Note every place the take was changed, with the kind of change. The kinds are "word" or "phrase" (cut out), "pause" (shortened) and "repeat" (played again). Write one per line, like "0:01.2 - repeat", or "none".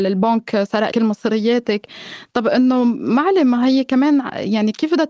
0:00.9 - word

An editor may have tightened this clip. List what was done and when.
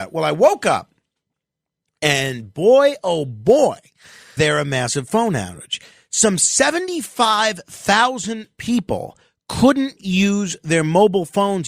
0:04.4 - word

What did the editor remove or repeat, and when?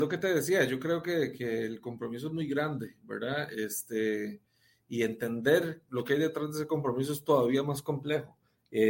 none

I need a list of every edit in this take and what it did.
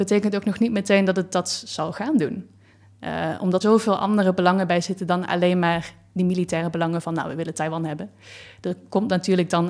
0:03.6 - word

